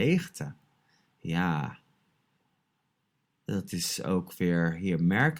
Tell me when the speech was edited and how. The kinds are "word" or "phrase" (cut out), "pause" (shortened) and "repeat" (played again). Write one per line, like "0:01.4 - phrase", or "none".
none